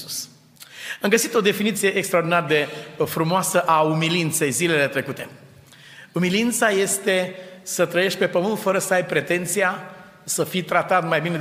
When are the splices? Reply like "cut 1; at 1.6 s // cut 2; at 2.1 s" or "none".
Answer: none